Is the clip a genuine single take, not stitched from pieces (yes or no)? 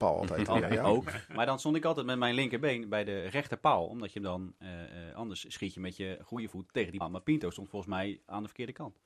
no